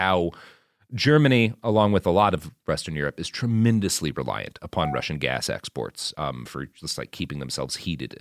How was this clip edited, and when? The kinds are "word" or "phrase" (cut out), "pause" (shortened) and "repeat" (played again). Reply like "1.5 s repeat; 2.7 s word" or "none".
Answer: none